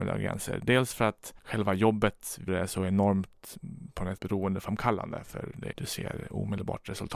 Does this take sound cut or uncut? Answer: cut